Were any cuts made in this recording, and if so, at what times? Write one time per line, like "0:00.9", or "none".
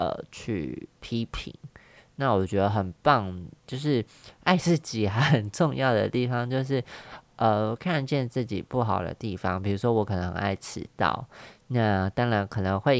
0:03.6